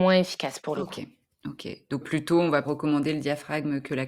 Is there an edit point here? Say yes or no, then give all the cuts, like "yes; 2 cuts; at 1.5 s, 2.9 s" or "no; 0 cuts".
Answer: yes; 2 cuts; at 2.0 s, 2.6 s